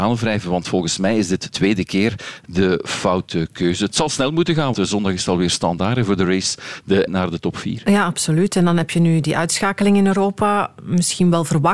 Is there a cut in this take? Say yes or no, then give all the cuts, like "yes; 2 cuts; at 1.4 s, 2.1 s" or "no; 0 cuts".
yes; 3 cuts; at 1.5 s, 4.7 s, 7.1 s